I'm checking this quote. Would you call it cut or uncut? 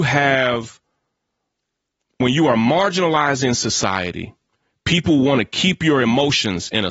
uncut